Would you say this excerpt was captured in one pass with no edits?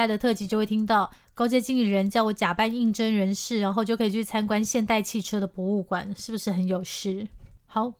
yes; 0 cuts

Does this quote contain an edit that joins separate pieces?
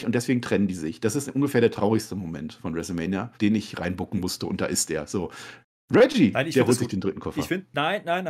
yes; 1 cut; at 3.3 s

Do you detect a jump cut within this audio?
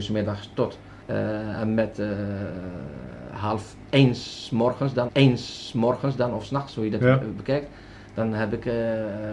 yes; 2 cuts; at 1.0 s, 5.1 s

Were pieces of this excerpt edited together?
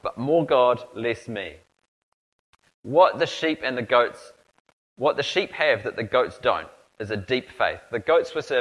no; 0 cuts

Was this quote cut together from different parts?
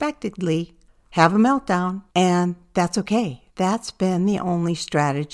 yes; 2 cuts; at 2.1 s, 3.5 s

